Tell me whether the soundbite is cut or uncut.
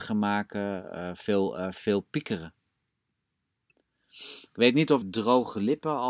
cut